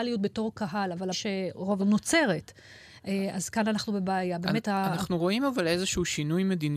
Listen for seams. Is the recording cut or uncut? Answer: cut